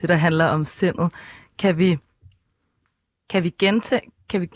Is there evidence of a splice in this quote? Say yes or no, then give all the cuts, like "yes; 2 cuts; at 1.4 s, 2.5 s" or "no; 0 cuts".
no; 0 cuts